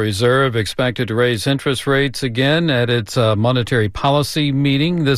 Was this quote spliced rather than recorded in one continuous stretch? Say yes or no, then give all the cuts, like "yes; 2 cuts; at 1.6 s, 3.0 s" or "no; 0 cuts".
no; 0 cuts